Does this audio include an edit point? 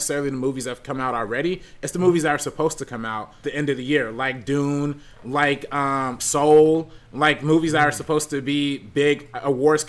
yes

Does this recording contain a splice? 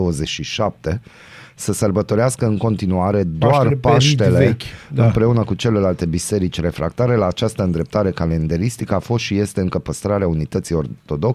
no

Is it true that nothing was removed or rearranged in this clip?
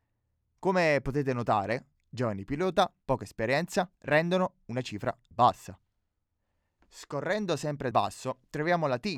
no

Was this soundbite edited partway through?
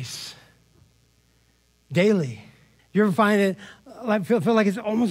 yes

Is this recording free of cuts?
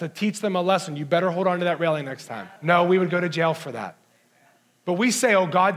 no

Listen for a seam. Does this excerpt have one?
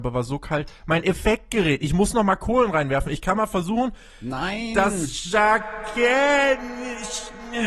no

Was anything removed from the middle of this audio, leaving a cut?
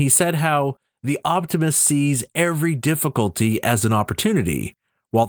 no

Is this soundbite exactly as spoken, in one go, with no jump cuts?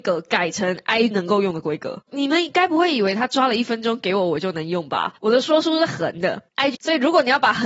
no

